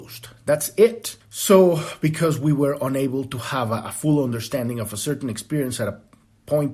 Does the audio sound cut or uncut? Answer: cut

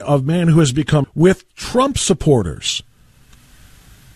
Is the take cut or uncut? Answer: cut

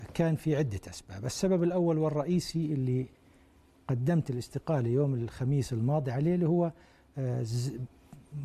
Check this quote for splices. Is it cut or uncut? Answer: uncut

